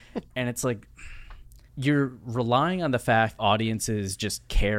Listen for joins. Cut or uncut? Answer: cut